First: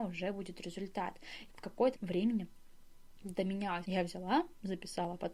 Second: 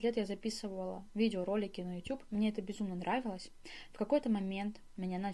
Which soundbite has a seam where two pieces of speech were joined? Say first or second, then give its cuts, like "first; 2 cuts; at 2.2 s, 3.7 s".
first; 3 cuts; at 1.5 s, 1.9 s, 3.8 s